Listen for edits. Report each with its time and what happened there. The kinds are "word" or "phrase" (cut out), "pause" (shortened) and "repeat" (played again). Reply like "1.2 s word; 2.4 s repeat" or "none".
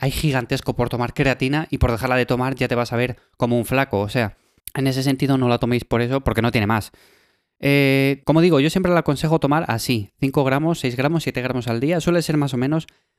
none